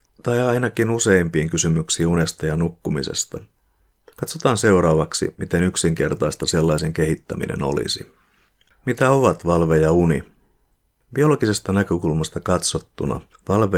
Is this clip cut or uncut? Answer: uncut